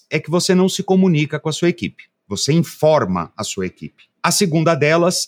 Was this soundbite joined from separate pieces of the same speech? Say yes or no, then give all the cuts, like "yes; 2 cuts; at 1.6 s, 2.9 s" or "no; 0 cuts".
yes; 1 cut; at 4.1 s